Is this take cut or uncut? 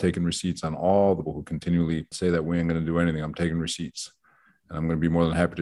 cut